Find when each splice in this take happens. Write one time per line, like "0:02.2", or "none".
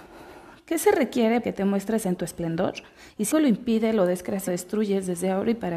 0:01.4
0:02.2
0:03.3
0:04.5